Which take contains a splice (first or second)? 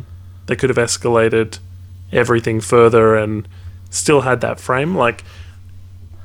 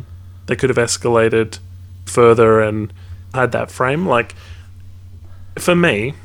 second